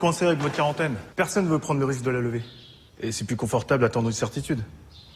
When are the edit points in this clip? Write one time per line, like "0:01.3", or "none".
0:01.1